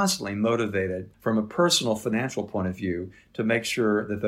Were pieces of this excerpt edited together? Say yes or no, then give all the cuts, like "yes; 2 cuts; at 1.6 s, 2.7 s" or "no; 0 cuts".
no; 0 cuts